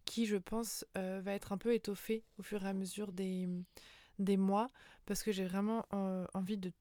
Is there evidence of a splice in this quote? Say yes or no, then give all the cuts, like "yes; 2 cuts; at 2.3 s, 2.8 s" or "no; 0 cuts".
no; 0 cuts